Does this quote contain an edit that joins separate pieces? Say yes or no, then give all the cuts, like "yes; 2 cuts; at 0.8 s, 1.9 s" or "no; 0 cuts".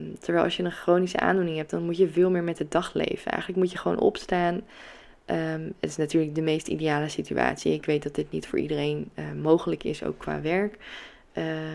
no; 0 cuts